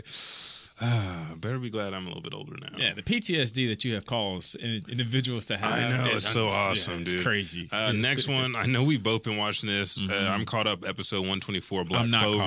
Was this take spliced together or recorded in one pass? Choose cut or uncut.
uncut